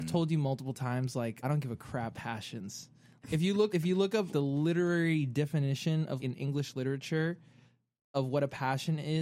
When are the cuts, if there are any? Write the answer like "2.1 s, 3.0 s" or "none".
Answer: 1.4 s, 2.1 s, 3.2 s, 3.7 s, 4.3 s, 6.2 s